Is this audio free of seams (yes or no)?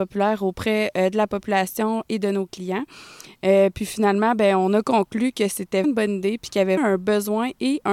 no